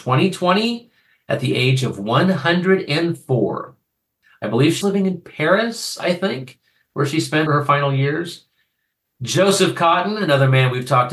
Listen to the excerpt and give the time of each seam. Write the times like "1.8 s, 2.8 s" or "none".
4.8 s, 7.5 s